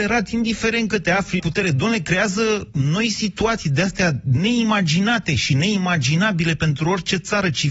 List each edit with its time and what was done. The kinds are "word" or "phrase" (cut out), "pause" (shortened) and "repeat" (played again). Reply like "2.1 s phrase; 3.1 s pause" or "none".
1.4 s phrase